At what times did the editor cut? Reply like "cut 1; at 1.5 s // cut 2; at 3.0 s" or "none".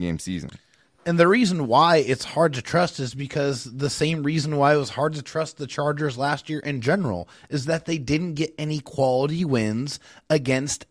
none